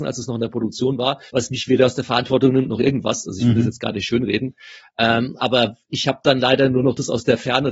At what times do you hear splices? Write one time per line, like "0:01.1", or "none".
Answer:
0:01.3